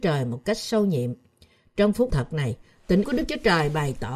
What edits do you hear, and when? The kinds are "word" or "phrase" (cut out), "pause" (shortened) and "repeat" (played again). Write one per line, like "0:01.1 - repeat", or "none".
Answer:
0:02.1 - word
0:03.0 - word